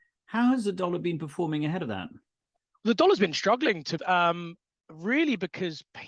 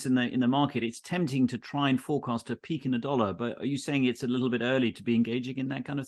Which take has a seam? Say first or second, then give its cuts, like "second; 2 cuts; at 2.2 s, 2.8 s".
first; 1 cut; at 4.0 s